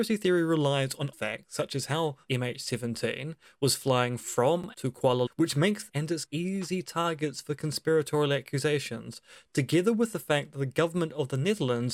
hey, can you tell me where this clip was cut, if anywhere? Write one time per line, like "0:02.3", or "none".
0:01.1
0:02.3
0:04.7
0:05.3
0:05.9
0:06.3